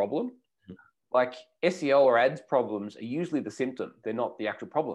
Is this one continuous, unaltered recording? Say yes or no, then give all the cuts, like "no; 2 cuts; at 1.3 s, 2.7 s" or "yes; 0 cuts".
yes; 0 cuts